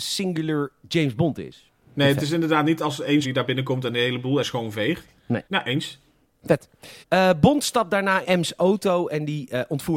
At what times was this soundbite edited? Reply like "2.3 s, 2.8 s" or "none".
3.2 s, 4.4 s, 5.4 s, 7.0 s, 8.2 s